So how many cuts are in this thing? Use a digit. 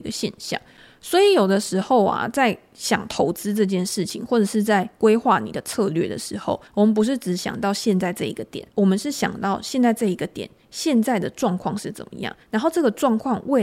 3